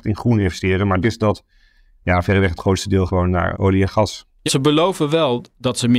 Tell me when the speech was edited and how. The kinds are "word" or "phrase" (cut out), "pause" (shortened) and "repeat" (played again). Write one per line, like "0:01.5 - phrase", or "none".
0:01.0 - word
0:03.1 - word
0:03.5 - word
0:04.5 - word